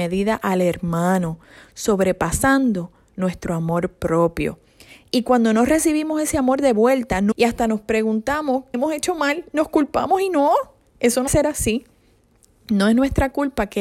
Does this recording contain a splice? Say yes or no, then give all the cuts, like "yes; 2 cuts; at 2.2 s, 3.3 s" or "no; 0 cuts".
yes; 3 cuts; at 7.3 s, 8.7 s, 11.3 s